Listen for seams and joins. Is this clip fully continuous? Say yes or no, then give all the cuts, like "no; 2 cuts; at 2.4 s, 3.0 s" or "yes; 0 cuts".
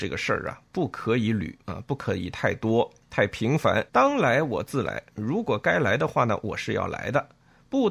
no; 1 cut; at 3.9 s